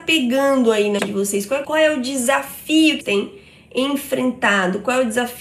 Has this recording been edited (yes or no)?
yes